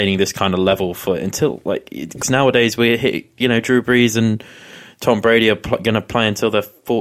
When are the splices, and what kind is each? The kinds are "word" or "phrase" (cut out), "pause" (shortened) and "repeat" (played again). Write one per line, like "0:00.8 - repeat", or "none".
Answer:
0:02.2 - phrase